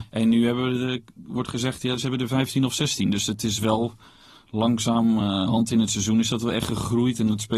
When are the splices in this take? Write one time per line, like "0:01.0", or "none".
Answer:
none